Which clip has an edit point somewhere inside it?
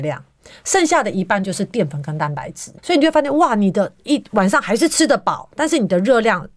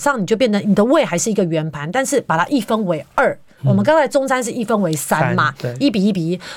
first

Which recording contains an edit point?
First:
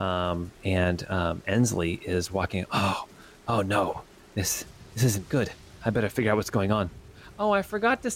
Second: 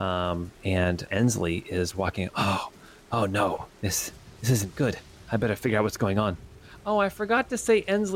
second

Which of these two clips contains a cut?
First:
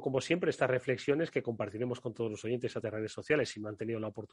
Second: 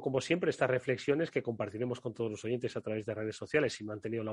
first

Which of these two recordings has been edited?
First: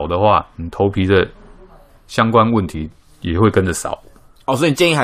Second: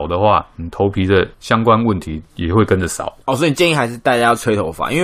second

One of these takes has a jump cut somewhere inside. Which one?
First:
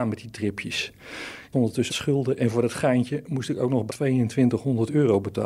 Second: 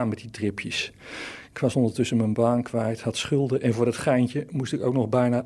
first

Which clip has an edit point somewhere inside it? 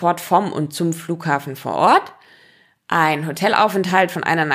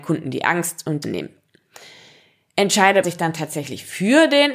second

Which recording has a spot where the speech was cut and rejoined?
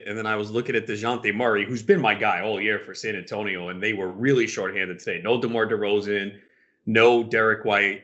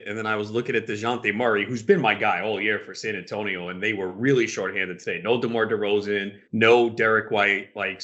second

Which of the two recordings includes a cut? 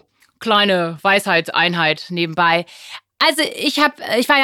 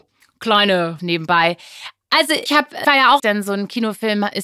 second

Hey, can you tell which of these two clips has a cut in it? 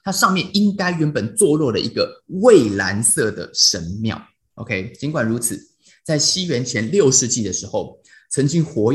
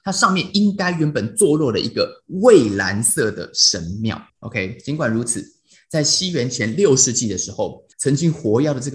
second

